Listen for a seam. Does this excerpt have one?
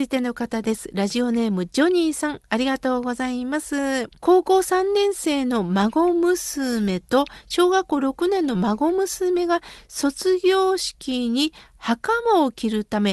yes; 1 cut; at 4.2 s

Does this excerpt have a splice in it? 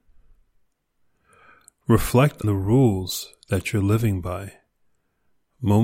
yes; 1 cut; at 2.4 s

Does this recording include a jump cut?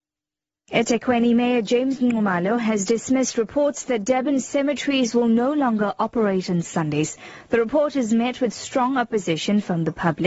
no; 0 cuts

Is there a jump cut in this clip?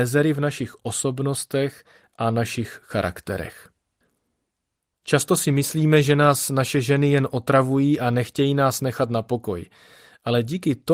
no; 0 cuts

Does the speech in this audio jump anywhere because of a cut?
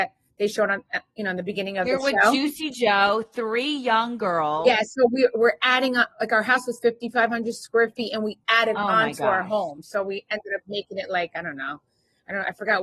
no; 0 cuts

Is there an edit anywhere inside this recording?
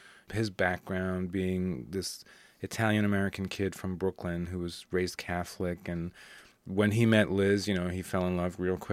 no; 0 cuts

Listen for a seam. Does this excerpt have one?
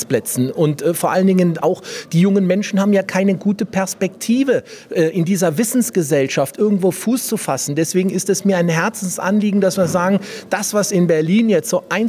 no; 0 cuts

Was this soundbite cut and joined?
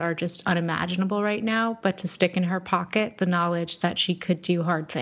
no; 0 cuts

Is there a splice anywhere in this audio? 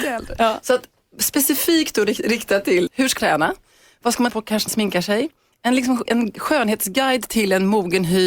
yes; 5 cuts; at 2.9 s, 3.2 s, 4.3 s, 4.7 s, 6.1 s

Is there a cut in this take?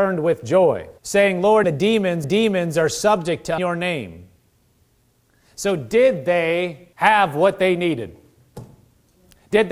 yes; 6 cuts; at 1.0 s, 1.6 s, 2.2 s, 3.6 s, 5.2 s, 6.9 s

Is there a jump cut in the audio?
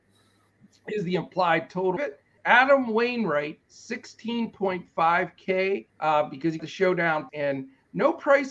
yes; 5 cuts; at 2.0 s, 2.4 s, 5.9 s, 6.6 s, 7.3 s

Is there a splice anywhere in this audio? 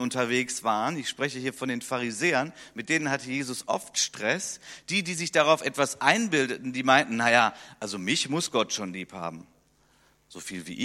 no; 0 cuts

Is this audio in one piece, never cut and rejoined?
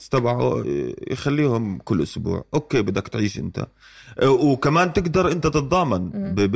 yes; 0 cuts

